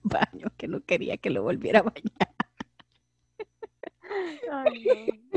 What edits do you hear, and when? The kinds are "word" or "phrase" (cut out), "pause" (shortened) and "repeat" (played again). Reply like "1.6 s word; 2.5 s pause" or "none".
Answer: none